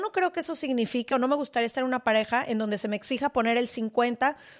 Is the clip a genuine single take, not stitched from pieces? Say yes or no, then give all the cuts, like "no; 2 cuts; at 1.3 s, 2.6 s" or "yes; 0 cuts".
yes; 0 cuts